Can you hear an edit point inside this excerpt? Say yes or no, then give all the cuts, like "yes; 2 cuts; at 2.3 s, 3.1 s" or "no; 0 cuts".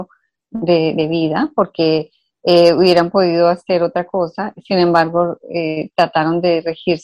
no; 0 cuts